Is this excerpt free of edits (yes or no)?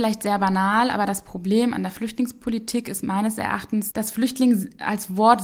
yes